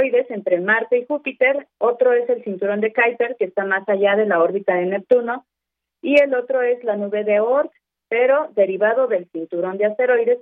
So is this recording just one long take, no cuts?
yes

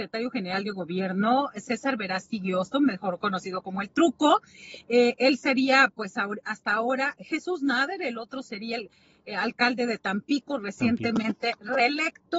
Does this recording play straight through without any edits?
yes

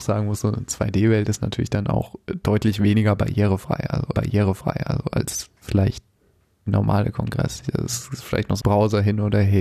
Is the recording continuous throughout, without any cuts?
no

